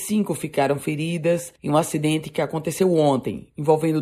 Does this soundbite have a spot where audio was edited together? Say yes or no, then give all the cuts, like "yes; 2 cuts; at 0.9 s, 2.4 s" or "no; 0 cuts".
yes; 1 cut; at 1.6 s